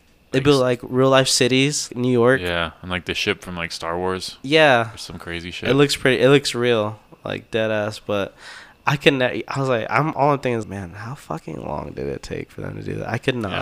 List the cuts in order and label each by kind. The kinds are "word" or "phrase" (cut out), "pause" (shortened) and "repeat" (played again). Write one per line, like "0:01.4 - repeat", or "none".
0:01.9 - word
0:10.6 - word